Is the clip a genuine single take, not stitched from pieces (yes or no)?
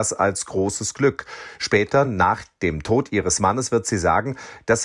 yes